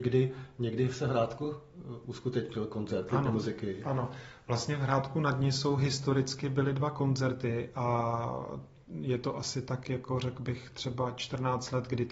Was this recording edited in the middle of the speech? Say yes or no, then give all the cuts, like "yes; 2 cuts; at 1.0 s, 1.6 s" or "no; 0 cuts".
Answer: no; 0 cuts